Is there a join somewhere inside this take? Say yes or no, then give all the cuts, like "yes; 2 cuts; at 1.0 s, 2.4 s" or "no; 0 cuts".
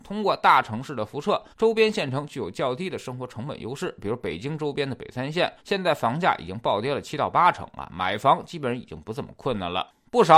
yes; 2 cuts; at 1.5 s, 5.6 s